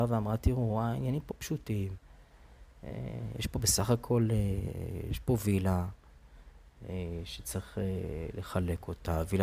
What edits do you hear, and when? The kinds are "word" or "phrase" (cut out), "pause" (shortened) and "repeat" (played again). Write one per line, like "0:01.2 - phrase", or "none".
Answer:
none